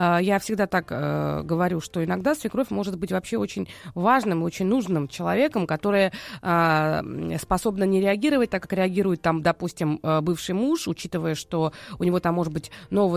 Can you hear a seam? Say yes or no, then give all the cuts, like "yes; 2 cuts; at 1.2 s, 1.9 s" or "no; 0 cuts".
no; 0 cuts